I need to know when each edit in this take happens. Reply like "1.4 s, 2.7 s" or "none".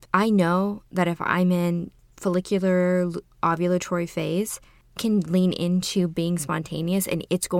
3.3 s, 5.0 s